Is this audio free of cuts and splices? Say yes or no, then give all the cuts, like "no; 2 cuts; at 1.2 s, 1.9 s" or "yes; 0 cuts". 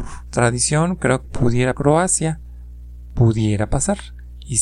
no; 2 cuts; at 1.2 s, 1.7 s